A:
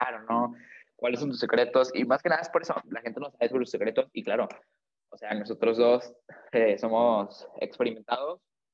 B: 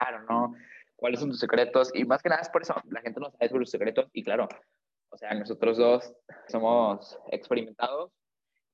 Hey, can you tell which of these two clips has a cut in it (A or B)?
B